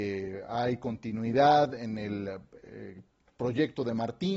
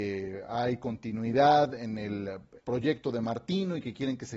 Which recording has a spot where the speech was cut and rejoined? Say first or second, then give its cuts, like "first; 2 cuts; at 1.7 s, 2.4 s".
second; 1 cut; at 2.6 s